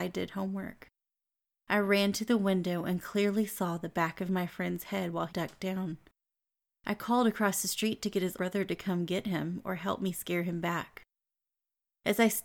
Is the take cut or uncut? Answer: cut